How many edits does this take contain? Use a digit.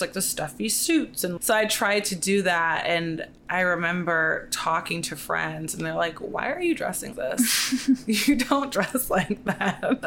2